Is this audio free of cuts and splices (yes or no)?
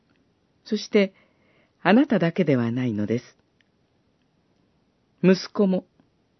yes